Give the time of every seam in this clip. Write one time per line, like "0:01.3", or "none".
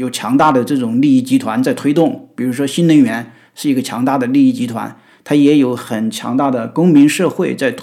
none